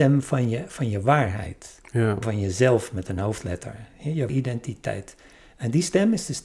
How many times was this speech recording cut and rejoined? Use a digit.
2